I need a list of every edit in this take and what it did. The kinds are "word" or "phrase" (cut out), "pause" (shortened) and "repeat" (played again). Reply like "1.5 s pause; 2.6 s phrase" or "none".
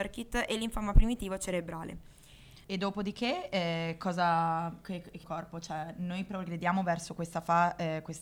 2.6 s pause; 5.2 s phrase